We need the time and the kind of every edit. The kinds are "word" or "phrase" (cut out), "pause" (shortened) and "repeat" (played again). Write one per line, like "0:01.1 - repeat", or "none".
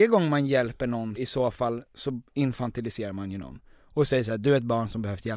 0:01.2 - word
0:02.3 - pause